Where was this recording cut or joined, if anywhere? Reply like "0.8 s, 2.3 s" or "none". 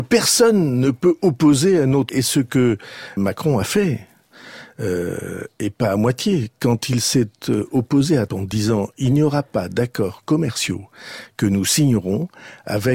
2.1 s, 3.2 s, 8.3 s

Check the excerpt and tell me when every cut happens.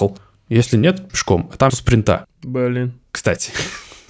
1.1 s, 1.7 s

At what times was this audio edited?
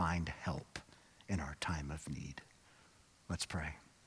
none

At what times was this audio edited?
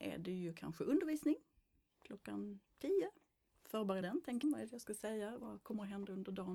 4.0 s, 4.4 s, 5.4 s

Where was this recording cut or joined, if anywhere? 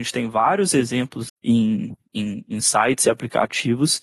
1.3 s

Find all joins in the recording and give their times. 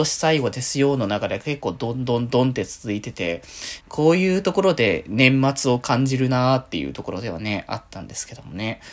3.8 s

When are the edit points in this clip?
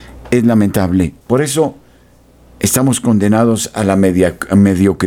1.2 s

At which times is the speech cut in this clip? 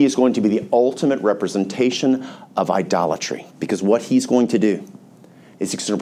3.5 s

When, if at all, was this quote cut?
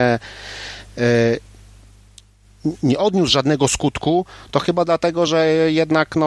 none

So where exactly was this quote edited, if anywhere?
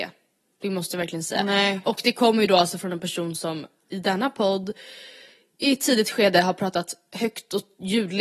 none

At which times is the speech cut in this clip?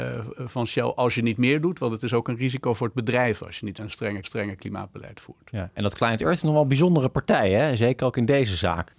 3.7 s, 4.2 s

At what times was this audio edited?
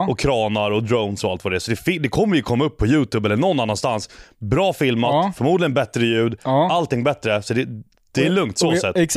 none

